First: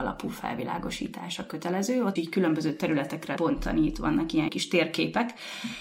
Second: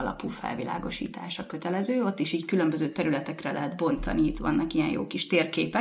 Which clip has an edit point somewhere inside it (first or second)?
first